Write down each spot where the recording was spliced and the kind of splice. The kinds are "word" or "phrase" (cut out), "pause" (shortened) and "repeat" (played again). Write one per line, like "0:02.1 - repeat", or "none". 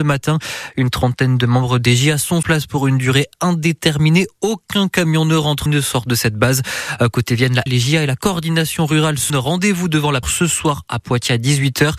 0:02.4 - word
0:05.7 - word
0:07.7 - word
0:09.3 - word
0:10.2 - word